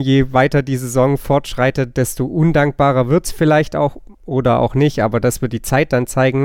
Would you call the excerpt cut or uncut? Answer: uncut